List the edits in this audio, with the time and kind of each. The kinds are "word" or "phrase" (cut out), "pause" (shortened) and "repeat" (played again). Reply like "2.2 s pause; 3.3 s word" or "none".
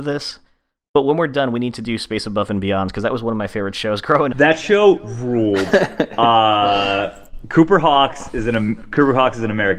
4.3 s word